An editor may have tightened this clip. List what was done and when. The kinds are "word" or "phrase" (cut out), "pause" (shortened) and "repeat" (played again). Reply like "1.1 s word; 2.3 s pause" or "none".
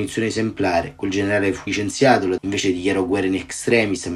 1.7 s word; 2.4 s word

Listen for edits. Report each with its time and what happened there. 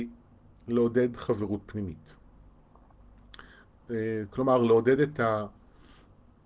none

